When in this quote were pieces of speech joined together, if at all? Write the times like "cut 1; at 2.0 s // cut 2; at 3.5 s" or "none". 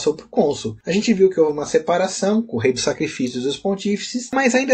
none